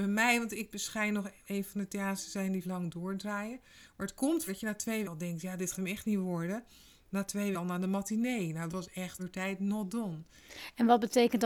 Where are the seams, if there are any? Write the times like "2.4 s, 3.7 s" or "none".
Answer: 1.4 s, 2.6 s, 4.5 s, 5.0 s, 5.7 s, 7.5 s, 8.7 s, 9.2 s